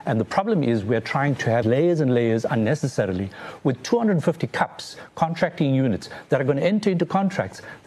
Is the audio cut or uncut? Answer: cut